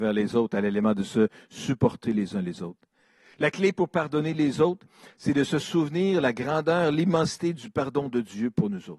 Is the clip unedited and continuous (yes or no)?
yes